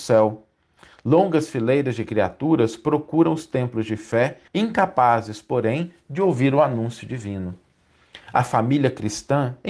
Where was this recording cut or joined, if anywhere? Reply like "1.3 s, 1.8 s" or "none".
4.5 s